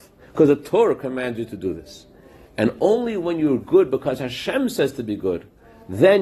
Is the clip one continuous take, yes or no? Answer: yes